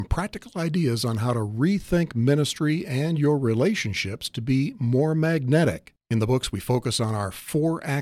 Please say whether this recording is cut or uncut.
uncut